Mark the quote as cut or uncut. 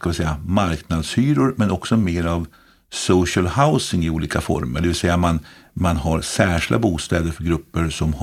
uncut